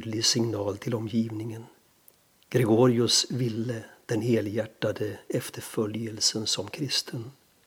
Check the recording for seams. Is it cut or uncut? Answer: uncut